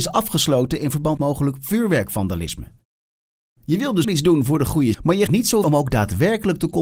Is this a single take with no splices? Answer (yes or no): no